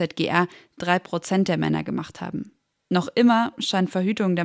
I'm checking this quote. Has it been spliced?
no; 0 cuts

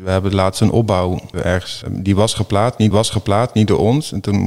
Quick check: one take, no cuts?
no; 3 cuts; at 1.3 s, 1.8 s, 2.9 s

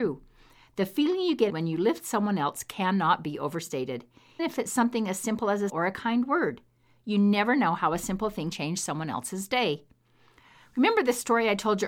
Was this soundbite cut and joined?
yes; 4 cuts; at 1.5 s, 4.4 s, 5.7 s, 8.5 s

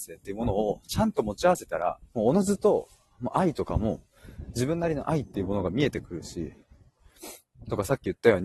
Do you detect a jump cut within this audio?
yes; 1 cut; at 2.1 s

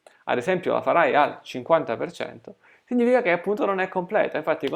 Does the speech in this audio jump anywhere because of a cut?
no; 0 cuts

